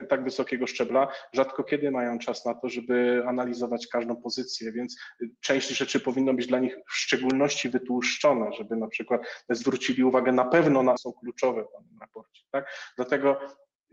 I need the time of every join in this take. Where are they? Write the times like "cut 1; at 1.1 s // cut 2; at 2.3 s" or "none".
cut 1; at 11.0 s